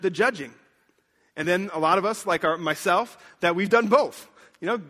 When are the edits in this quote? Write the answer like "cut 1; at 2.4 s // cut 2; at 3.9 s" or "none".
none